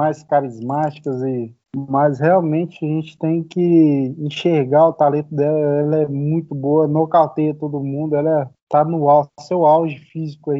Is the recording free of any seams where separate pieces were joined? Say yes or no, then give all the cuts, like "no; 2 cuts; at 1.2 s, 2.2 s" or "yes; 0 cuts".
no; 2 cuts; at 1.6 s, 8.5 s